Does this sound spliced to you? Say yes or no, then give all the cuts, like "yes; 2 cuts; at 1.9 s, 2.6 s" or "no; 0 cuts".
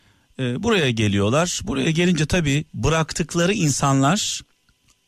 yes; 1 cut; at 2.7 s